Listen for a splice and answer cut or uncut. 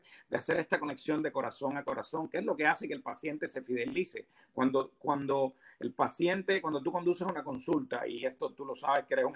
uncut